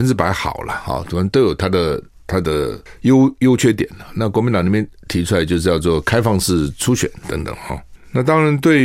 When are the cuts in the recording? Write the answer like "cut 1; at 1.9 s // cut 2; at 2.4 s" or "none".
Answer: cut 1; at 7.2 s